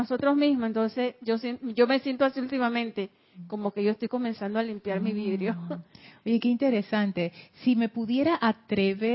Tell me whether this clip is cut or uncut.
uncut